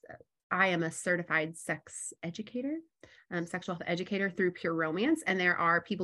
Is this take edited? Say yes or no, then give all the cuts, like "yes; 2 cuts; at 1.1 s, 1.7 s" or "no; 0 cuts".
no; 0 cuts